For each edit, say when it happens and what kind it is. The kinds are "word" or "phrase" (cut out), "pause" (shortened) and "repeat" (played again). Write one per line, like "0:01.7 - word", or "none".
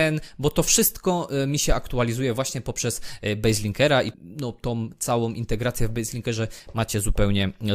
0:04.1 - word